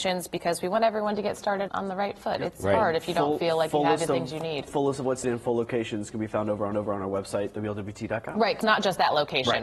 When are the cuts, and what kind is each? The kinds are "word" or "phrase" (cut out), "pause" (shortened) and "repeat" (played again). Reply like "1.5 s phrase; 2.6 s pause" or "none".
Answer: 1.7 s word; 5.2 s word; 6.7 s repeat; 8.6 s word